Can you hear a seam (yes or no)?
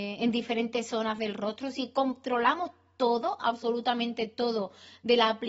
no